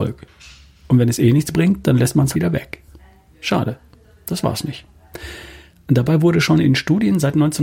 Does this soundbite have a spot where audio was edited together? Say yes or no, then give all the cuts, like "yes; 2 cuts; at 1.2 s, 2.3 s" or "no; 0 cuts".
yes; 1 cut; at 2.3 s